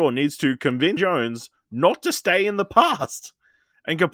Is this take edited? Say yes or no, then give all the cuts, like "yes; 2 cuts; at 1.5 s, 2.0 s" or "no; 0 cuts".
yes; 1 cut; at 1.0 s